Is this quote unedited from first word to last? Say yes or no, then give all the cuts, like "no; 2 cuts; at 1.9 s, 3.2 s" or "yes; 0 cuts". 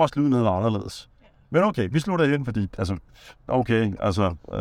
yes; 0 cuts